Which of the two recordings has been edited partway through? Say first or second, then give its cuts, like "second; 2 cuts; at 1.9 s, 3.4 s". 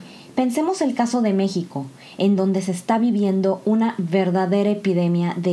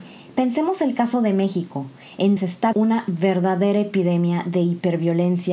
second; 2 cuts; at 2.4 s, 2.7 s